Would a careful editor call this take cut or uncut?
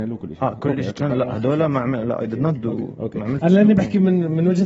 uncut